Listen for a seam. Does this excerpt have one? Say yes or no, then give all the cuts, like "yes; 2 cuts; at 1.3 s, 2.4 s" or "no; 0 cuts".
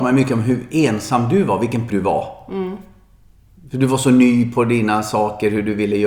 yes; 1 cut; at 1.9 s